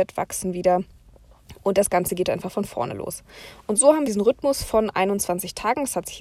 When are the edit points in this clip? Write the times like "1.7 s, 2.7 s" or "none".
4.1 s